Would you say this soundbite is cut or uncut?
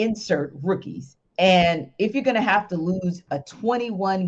cut